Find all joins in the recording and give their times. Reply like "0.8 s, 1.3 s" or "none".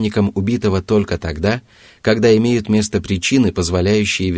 none